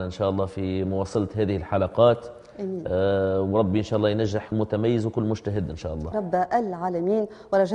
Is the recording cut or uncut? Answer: cut